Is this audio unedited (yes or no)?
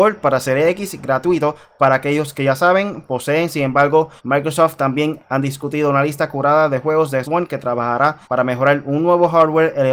no